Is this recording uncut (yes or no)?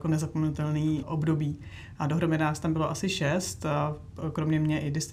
no